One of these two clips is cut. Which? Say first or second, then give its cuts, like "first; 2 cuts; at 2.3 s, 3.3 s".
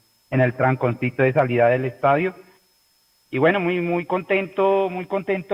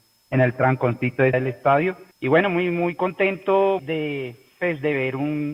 second; 3 cuts; at 1.3 s, 2.1 s, 3.8 s